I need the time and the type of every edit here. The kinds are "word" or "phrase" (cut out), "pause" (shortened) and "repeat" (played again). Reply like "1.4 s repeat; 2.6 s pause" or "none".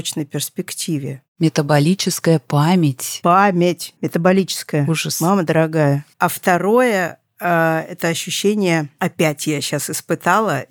4.0 s pause; 6.1 s pause